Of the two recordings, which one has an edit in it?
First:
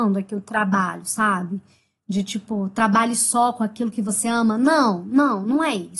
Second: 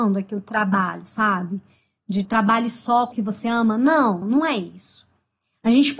second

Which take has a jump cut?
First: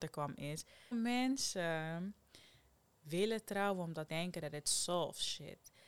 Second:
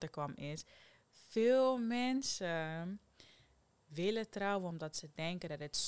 first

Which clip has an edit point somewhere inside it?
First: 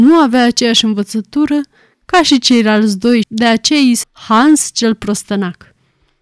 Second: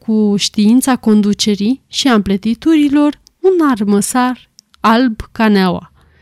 first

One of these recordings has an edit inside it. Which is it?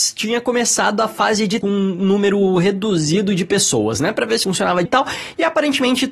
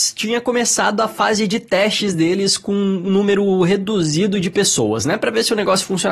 first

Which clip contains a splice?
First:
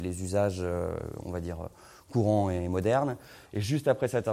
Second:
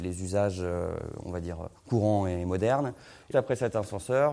second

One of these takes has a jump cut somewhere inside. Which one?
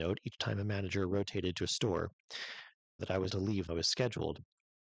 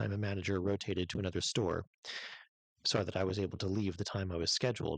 first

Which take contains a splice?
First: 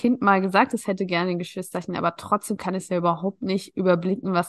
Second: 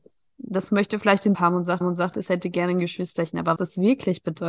second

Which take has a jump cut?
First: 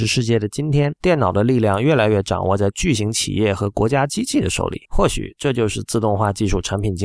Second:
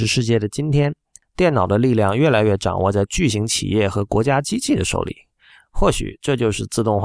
first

